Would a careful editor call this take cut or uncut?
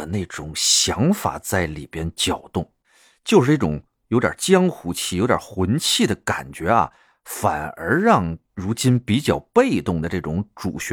uncut